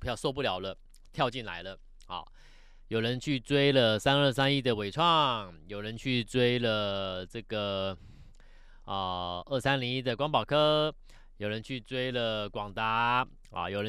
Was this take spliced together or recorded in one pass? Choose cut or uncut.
uncut